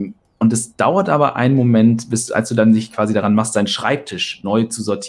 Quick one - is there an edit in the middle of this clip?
no; 0 cuts

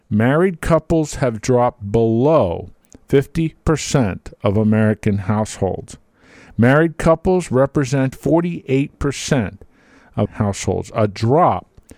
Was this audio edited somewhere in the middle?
yes; 2 cuts; at 8.1 s, 10.3 s

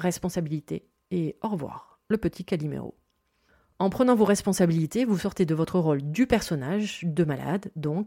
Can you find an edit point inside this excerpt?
no; 0 cuts

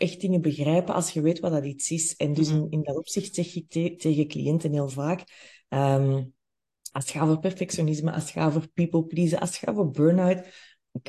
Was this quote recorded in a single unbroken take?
yes; 0 cuts

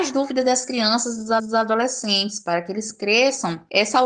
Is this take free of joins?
no; 1 cut; at 1.4 s

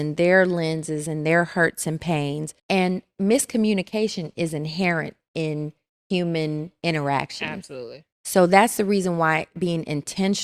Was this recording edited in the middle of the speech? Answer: yes; 1 cut; at 2.6 s

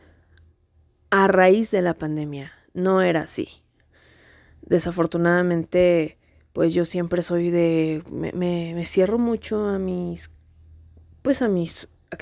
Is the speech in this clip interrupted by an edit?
no; 0 cuts

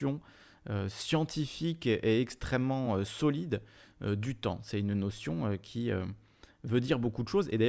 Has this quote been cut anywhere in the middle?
no; 0 cuts

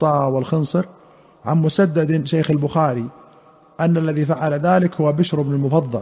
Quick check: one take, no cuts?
yes; 0 cuts

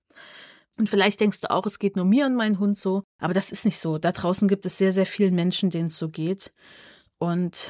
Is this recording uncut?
yes; 0 cuts

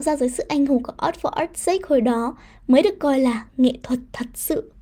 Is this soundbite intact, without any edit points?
yes; 0 cuts

